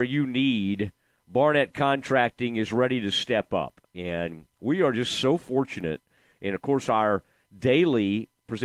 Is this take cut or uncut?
uncut